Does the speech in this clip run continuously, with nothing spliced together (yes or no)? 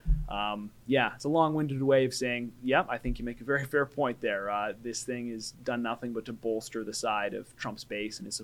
yes